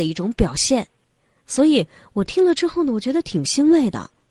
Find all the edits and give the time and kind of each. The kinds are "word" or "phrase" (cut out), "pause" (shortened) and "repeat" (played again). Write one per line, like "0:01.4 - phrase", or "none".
none